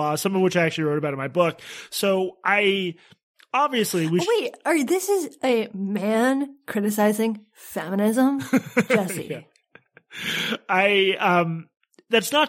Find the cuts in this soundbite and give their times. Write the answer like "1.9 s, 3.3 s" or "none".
none